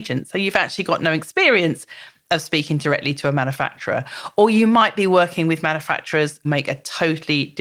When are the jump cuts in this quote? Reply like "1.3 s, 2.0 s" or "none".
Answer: 6.4 s